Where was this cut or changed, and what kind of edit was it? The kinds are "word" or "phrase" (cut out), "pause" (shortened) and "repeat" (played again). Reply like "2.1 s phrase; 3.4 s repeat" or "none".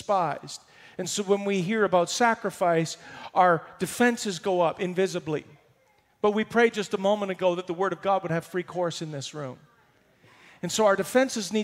none